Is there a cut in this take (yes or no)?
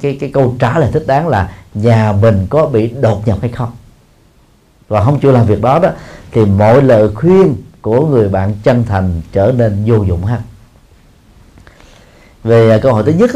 no